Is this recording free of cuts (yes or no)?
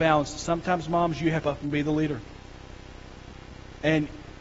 no